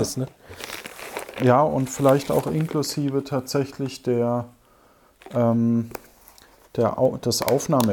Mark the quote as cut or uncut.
uncut